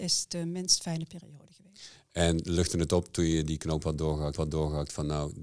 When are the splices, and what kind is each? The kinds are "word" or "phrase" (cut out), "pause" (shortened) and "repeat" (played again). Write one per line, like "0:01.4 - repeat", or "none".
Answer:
0:04.3 - repeat